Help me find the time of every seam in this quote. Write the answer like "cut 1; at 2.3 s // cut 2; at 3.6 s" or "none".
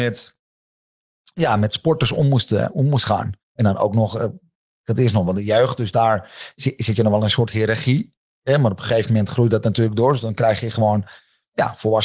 cut 1; at 3.4 s // cut 2; at 4.6 s